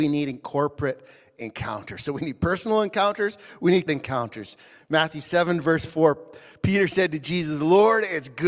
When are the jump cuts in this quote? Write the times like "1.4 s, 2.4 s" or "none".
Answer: 3.9 s